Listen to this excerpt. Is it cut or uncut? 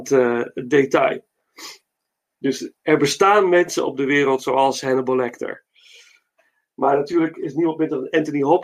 uncut